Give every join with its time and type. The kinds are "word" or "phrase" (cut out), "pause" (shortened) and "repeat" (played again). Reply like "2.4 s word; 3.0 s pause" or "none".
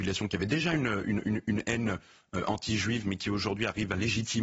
none